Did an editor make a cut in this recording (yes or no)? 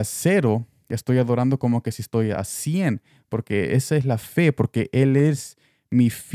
no